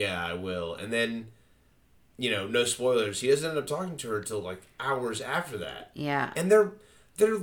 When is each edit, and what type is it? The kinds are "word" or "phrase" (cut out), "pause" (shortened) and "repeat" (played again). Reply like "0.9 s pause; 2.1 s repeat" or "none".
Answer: none